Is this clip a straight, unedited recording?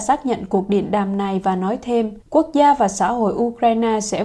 no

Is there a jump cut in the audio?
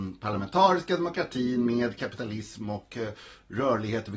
no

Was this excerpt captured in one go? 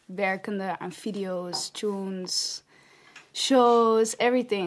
yes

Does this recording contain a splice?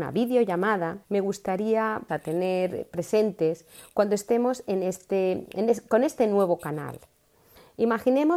yes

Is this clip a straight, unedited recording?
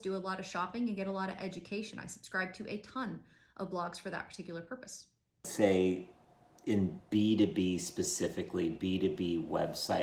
yes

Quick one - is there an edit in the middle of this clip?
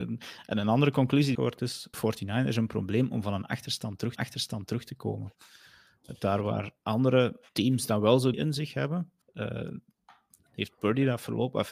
yes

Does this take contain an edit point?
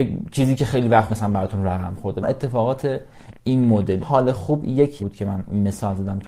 yes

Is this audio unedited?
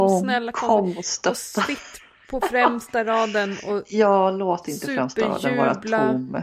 yes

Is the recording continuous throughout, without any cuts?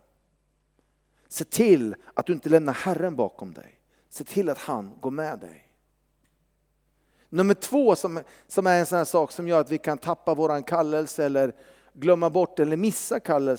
yes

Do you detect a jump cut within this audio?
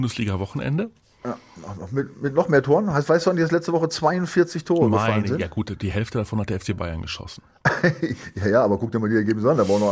no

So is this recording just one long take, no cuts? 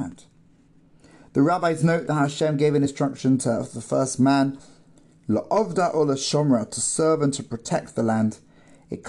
yes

